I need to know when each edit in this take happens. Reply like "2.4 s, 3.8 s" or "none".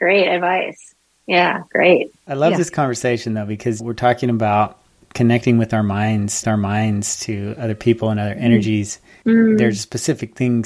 2.2 s, 6.4 s, 9.2 s